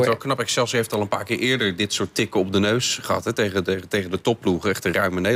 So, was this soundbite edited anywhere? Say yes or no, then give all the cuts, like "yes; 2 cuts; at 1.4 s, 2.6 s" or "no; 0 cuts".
no; 0 cuts